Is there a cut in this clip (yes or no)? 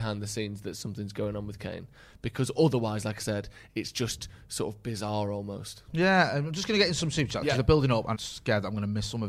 yes